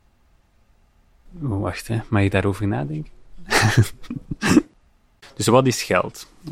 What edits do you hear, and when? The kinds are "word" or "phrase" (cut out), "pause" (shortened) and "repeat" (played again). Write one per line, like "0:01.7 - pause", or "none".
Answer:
none